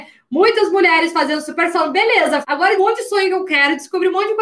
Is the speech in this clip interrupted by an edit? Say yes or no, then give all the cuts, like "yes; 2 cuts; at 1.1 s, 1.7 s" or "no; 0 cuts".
yes; 3 cuts; at 1.7 s, 2.4 s, 2.8 s